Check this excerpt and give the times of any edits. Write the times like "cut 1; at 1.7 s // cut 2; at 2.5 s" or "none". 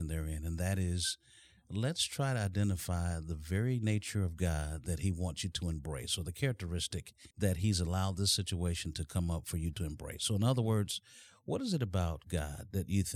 cut 1; at 7.3 s